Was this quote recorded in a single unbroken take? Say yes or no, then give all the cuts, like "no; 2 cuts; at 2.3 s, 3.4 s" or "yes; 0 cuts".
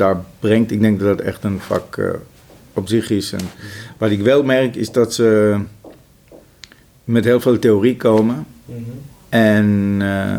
yes; 0 cuts